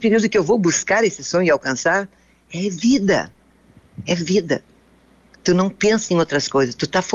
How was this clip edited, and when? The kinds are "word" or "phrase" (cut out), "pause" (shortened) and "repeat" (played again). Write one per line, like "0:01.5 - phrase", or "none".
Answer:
none